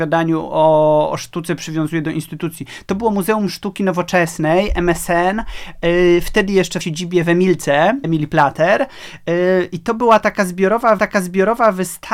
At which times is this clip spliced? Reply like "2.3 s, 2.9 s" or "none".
6.8 s, 8.0 s, 11.0 s